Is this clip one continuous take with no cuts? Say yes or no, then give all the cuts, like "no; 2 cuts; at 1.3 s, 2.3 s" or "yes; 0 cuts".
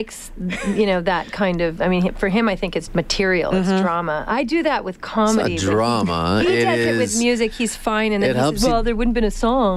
no; 1 cut; at 2.9 s